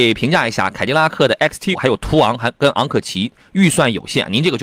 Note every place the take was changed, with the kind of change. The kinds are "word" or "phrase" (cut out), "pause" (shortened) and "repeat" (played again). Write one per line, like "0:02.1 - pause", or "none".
0:01.7 - word